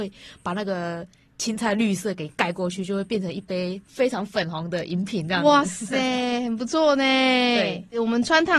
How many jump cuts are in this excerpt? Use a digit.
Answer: 0